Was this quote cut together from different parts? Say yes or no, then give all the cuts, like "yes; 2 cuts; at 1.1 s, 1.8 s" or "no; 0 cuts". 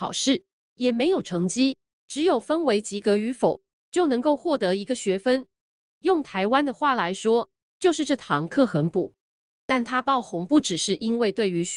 no; 0 cuts